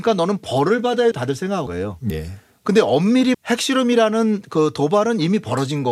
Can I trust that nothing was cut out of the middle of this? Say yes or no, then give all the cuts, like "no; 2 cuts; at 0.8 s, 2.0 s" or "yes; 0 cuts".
no; 4 cuts; at 1.1 s, 1.7 s, 2.1 s, 3.3 s